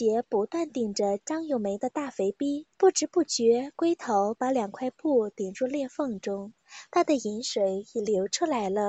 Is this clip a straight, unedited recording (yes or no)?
no